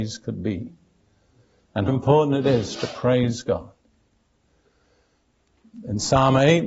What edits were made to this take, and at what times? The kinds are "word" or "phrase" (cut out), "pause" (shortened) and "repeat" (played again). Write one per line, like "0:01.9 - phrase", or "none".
0:01.9 - word